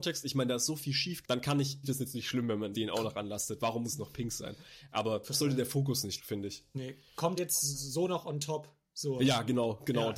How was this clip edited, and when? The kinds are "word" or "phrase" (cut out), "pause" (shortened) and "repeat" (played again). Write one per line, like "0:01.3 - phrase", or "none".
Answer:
0:01.2 - word
0:01.8 - word
0:02.7 - word
0:03.8 - word
0:05.3 - word
0:06.2 - word
0:07.4 - word